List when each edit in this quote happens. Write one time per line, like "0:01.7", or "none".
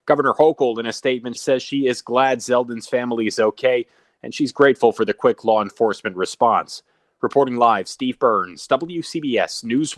0:01.3